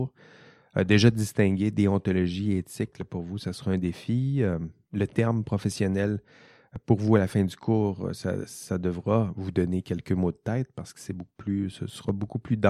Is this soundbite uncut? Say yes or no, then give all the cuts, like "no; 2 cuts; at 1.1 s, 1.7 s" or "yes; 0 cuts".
yes; 0 cuts